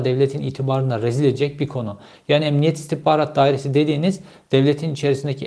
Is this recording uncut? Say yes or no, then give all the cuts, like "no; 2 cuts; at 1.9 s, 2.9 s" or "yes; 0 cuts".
yes; 0 cuts